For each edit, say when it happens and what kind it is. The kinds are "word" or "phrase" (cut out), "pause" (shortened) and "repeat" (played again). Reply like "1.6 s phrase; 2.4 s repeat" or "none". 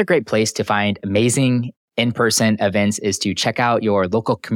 none